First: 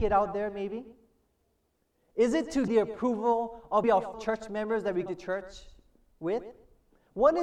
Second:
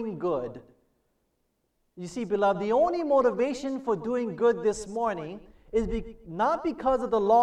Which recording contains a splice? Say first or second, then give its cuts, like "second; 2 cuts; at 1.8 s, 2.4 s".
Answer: first; 4 cuts; at 2.7 s, 3.8 s, 4.1 s, 5.1 s